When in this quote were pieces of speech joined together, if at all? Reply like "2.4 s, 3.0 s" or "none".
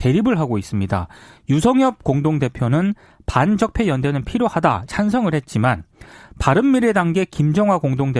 4.9 s